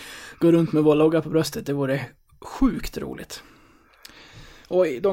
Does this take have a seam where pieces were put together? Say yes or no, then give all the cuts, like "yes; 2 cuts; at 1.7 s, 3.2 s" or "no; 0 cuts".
no; 0 cuts